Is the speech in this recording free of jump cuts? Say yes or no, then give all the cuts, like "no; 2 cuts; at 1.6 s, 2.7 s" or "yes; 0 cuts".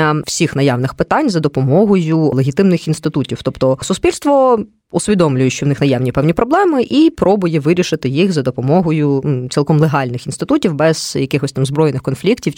yes; 0 cuts